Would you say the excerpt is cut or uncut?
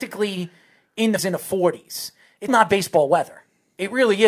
cut